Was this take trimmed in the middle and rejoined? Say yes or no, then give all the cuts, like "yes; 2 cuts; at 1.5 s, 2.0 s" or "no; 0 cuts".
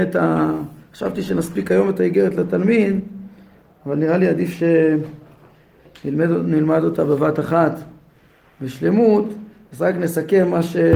no; 0 cuts